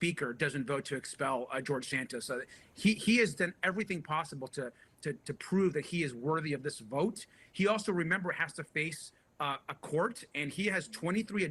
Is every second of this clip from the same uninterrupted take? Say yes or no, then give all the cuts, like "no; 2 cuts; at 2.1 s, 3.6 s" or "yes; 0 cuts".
yes; 0 cuts